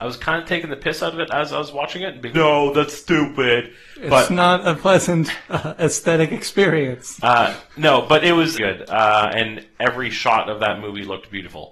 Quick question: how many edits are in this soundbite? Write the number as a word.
three